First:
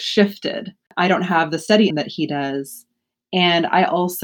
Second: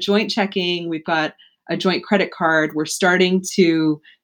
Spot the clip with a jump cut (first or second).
first